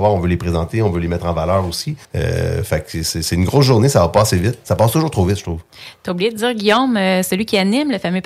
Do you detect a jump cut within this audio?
yes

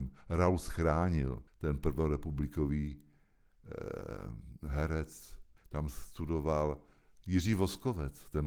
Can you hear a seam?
yes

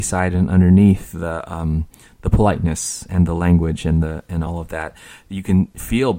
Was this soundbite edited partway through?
no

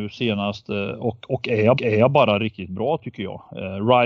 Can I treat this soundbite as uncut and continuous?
no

